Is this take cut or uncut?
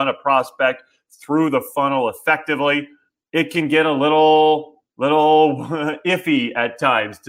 uncut